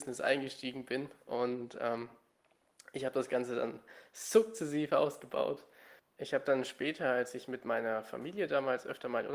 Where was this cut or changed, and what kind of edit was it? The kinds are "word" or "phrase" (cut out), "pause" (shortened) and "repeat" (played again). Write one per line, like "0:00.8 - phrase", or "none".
none